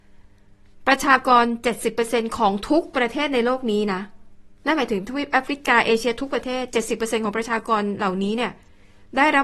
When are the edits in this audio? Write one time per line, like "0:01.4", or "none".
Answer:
0:04.6